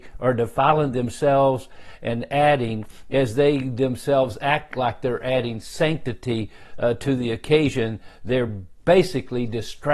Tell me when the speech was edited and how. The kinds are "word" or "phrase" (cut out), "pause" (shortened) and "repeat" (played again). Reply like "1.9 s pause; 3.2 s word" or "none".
none